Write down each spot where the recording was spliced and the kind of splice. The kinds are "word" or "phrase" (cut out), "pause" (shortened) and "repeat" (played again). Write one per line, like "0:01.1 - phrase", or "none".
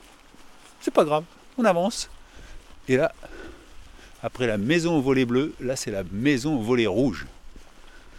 none